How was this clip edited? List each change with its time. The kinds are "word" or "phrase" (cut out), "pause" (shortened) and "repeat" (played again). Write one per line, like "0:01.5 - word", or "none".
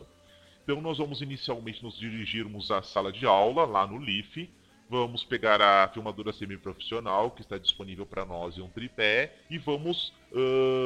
0:09.4 - pause